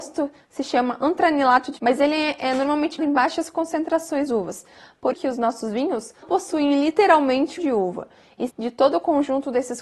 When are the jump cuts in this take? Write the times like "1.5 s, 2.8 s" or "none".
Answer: 1.8 s, 3.0 s, 4.3 s, 5.1 s, 6.2 s, 7.6 s, 8.5 s

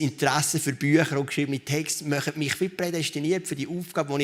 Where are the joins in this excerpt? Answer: none

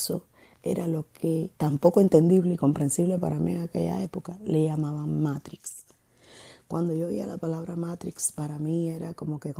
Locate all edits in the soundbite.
1.6 s

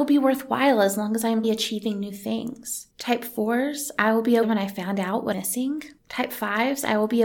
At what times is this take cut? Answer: 1.4 s, 2.9 s, 4.4 s, 5.3 s, 6.0 s

